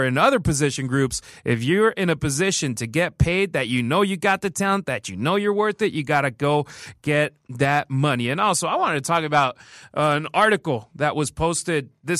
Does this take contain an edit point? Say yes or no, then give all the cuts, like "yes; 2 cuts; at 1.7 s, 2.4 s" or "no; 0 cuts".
no; 0 cuts